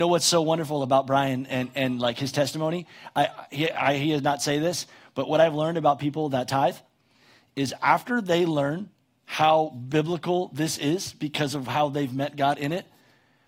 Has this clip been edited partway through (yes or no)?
no